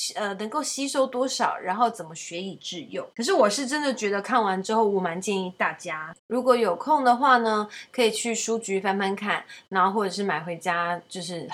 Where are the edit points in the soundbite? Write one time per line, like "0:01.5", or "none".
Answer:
0:03.1
0:06.2